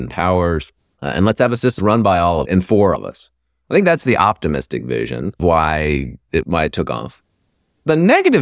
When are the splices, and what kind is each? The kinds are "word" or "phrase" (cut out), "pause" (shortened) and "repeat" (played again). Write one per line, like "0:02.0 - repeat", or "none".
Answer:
0:01.8 - word
0:02.5 - word
0:03.0 - word
0:05.4 - word
0:06.4 - word

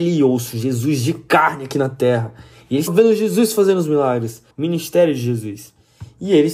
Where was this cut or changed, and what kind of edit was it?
0:02.9 - word
0:04.5 - pause

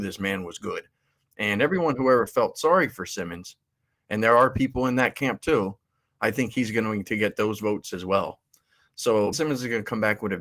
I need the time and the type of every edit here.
0:09.3 - word

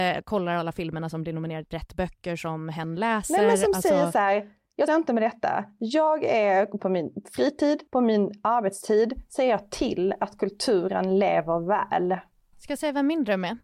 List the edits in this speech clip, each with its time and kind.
0:01.7 - phrase
0:04.9 - word
0:06.8 - word
0:07.9 - pause

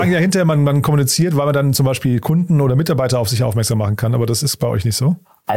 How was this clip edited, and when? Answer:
none

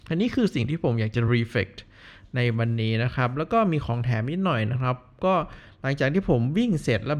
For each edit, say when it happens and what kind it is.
none

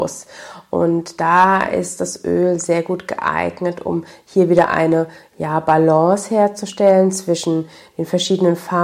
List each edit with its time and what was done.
none

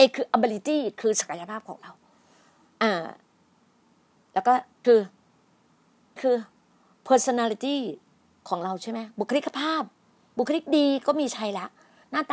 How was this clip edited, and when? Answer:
0:04.8 - word
0:06.2 - word

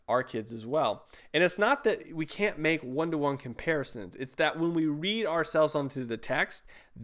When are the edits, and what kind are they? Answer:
none

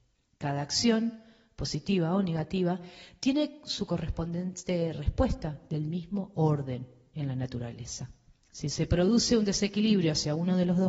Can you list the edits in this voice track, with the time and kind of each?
none

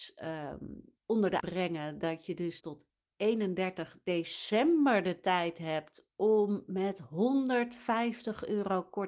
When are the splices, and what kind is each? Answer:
0:01.0 - pause
0:01.4 - word
0:02.6 - word

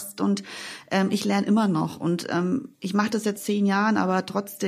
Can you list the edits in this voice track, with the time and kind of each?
0:02.7 - pause
0:03.4 - word

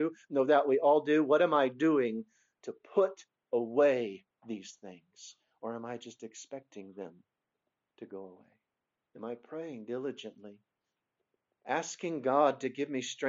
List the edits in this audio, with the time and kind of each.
none

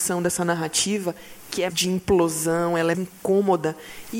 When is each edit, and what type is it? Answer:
0:01.7 - word
0:02.9 - word

